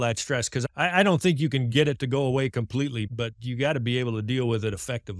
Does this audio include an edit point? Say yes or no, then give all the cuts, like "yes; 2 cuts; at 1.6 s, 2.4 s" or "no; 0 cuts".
no; 0 cuts